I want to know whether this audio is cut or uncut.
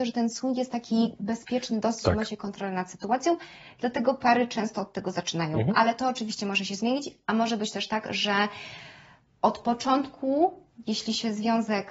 uncut